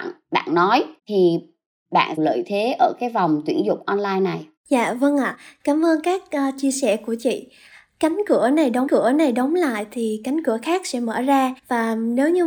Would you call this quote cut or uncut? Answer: cut